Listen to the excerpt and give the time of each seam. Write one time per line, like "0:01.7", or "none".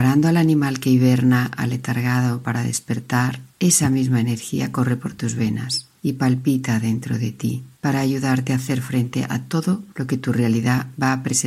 0:03.5
0:06.0
0:07.7
0:09.9